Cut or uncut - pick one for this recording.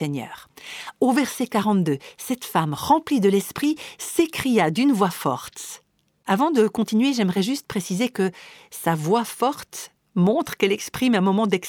uncut